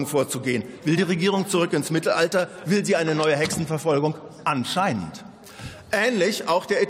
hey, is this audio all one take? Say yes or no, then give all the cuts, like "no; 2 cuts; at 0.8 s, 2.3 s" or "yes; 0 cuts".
yes; 0 cuts